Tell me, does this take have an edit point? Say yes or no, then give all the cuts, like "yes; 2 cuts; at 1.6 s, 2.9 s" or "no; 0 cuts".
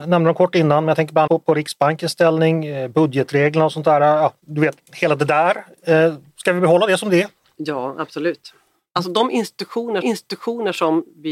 yes; 3 cuts; at 1.3 s, 7.4 s, 10.0 s